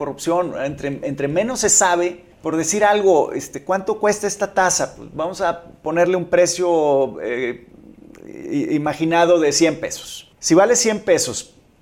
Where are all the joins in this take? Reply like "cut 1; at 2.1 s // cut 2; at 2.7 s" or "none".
cut 1; at 2.3 s // cut 2; at 10.3 s